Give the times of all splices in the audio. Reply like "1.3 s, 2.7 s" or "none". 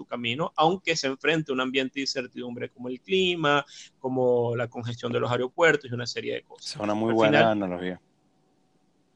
none